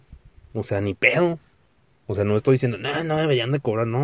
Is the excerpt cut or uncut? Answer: uncut